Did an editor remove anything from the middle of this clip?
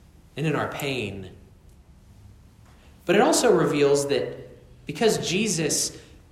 no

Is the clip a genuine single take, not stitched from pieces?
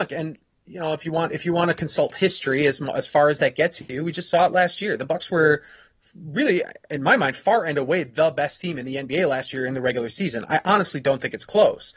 yes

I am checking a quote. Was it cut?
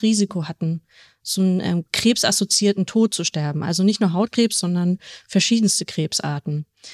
no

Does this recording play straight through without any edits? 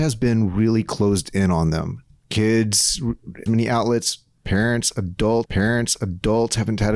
no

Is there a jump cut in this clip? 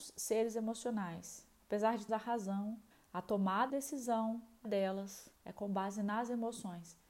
yes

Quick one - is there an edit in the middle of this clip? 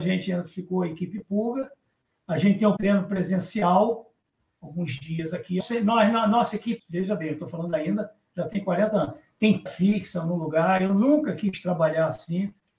yes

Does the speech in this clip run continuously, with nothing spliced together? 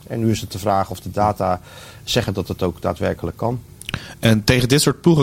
yes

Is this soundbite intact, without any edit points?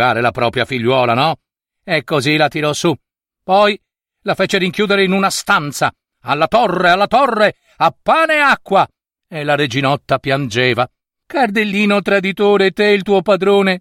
yes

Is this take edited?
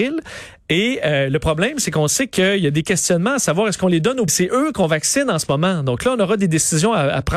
yes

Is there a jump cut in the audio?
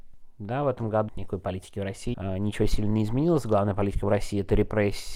yes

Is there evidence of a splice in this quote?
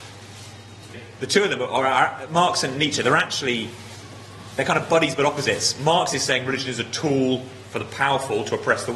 yes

